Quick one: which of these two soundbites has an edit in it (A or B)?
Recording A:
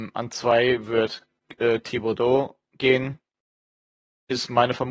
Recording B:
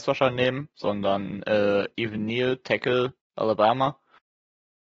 A